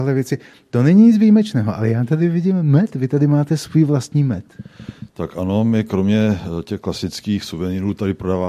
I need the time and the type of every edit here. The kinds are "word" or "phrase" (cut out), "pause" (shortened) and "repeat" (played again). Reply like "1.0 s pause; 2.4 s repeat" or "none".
none